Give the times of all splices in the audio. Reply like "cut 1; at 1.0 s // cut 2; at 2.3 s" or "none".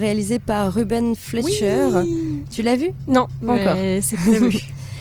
none